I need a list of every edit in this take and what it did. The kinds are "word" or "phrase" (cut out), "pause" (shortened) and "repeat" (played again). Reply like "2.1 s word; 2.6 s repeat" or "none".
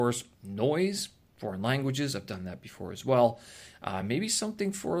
none